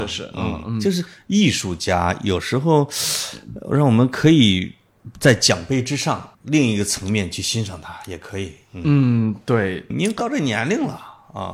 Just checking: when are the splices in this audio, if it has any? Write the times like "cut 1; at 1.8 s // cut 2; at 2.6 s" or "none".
cut 1; at 6.3 s // cut 2; at 9.9 s